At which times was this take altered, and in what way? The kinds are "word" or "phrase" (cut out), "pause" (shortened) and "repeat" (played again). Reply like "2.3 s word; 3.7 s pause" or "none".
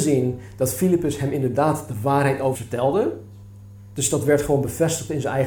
2.5 s word